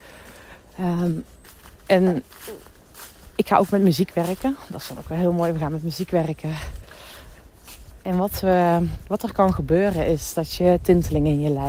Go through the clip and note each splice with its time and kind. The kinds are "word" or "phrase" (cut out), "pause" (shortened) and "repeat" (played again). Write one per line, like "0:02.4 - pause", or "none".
0:01.8 - pause
0:08.0 - pause